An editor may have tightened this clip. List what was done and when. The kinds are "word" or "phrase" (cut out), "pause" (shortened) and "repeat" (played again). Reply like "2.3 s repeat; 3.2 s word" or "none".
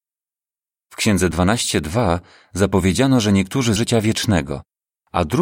1.3 s word; 3.8 s phrase